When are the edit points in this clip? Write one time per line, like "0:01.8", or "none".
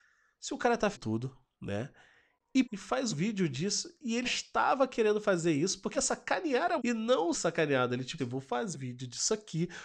0:00.9
0:02.6
0:03.1
0:04.2
0:05.9
0:06.8
0:07.3
0:08.2
0:08.7